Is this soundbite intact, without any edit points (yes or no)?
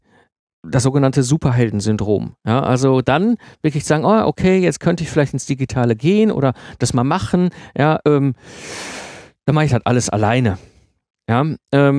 yes